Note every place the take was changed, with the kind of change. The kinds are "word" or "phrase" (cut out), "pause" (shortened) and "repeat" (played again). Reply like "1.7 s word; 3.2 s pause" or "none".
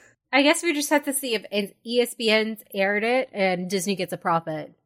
none